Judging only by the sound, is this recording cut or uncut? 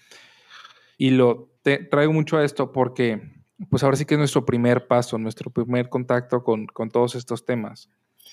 cut